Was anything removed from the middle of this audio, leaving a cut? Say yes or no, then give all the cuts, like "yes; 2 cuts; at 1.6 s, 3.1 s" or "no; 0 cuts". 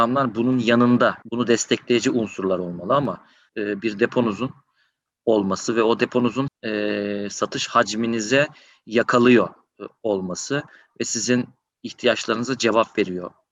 yes; 3 cuts; at 1.2 s, 3.5 s, 6.5 s